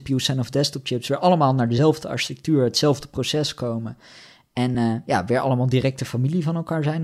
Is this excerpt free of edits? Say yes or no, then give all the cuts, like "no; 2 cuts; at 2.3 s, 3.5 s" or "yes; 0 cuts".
yes; 0 cuts